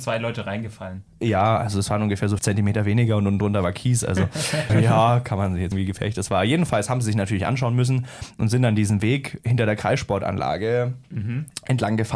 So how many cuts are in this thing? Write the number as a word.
three